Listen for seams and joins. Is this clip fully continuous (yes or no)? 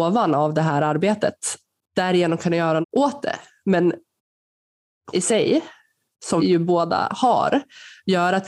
no